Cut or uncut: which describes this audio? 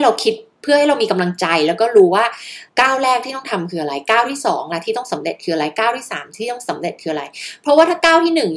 cut